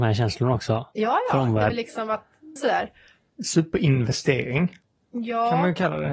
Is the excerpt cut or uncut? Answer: cut